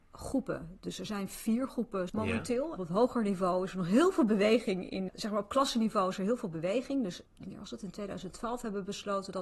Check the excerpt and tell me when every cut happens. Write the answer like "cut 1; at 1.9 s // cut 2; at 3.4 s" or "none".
cut 1; at 2.1 s // cut 2; at 2.8 s // cut 3; at 5.1 s // cut 4; at 7.3 s

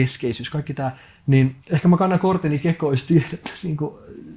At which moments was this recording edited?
cut 1; at 1.6 s

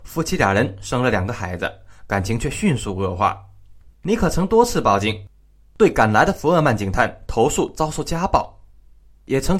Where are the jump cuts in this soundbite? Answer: cut 1; at 3.9 s

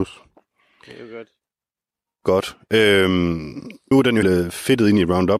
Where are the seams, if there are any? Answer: cut 1; at 3.9 s // cut 2; at 4.2 s

